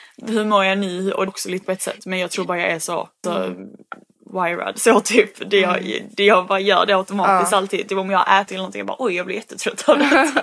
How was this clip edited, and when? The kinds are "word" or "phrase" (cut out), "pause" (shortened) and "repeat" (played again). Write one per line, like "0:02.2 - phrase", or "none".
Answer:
0:01.3 - word
0:01.6 - word
0:03.2 - word
0:08.5 - word